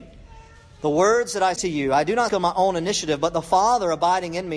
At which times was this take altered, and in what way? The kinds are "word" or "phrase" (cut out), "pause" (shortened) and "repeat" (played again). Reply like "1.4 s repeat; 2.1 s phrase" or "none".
1.6 s word; 2.3 s word